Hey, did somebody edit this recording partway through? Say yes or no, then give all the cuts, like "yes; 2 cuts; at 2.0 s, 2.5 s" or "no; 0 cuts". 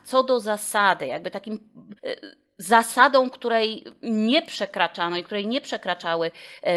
yes; 1 cut; at 2.0 s